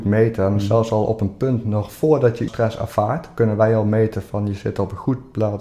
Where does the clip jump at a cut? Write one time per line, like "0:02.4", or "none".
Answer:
0:02.5